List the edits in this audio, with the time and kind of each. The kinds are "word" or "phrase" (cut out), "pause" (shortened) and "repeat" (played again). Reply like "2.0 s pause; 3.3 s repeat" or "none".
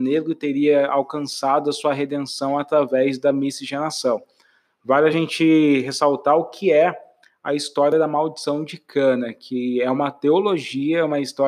none